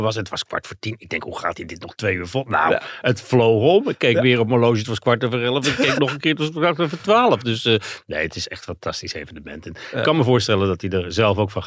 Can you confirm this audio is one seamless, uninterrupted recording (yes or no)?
yes